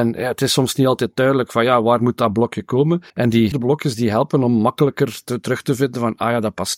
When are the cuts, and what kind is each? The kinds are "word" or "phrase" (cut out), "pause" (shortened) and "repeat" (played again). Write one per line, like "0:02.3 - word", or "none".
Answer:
0:03.1 - pause
0:03.5 - word